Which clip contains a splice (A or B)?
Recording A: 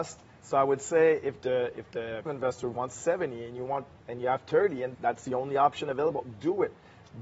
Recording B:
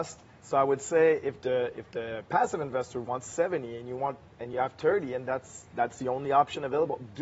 A